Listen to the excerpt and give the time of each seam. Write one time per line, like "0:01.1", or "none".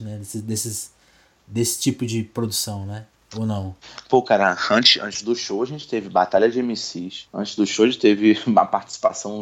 0:07.3